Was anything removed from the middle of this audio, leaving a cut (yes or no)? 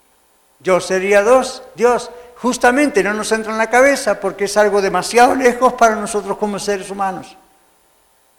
no